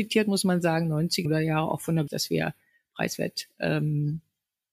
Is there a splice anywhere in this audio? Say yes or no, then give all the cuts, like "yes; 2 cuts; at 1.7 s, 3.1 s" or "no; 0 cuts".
yes; 2 cuts; at 1.2 s, 2.1 s